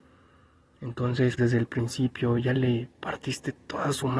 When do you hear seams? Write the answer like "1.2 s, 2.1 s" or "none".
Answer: 1.4 s